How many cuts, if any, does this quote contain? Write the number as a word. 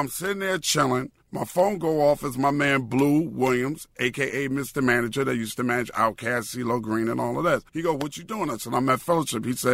two